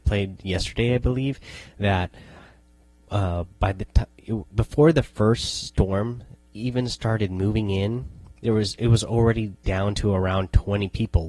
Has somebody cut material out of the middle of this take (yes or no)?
no